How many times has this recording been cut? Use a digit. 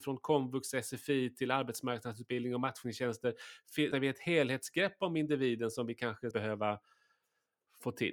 2